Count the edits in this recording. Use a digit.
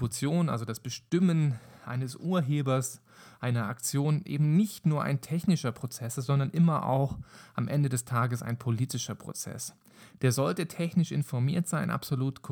0